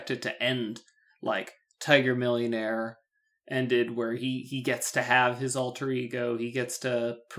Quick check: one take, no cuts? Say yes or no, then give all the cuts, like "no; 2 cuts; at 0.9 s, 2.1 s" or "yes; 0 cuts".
yes; 0 cuts